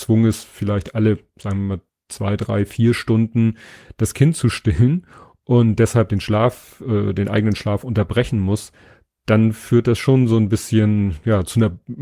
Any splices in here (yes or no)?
no